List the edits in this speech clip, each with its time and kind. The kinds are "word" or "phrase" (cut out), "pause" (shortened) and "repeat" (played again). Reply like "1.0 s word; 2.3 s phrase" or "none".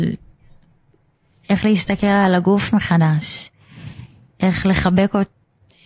none